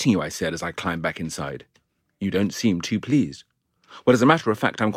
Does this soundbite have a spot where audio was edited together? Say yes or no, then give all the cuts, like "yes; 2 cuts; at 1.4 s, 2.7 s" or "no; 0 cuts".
no; 0 cuts